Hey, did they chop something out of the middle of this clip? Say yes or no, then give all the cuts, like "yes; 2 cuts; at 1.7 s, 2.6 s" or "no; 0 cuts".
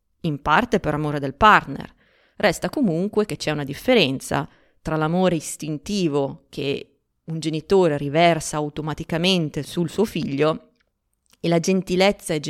no; 0 cuts